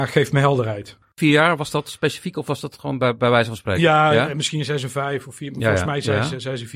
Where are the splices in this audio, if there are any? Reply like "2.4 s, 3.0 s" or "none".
1.0 s